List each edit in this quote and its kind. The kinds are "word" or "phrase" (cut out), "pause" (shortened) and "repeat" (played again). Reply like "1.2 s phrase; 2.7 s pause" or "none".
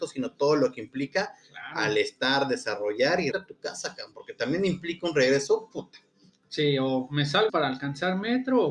3.3 s word; 7.5 s word